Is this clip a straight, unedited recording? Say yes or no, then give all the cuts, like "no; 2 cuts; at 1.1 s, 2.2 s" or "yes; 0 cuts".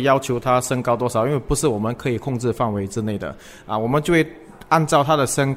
yes; 0 cuts